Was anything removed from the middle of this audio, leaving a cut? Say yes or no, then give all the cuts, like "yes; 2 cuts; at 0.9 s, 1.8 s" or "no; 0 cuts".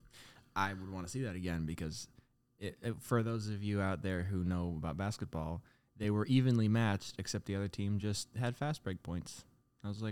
no; 0 cuts